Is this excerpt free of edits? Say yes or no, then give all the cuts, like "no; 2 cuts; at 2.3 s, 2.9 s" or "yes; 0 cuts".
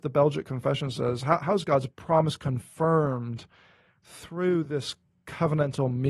yes; 0 cuts